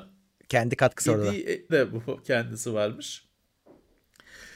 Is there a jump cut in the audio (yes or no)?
yes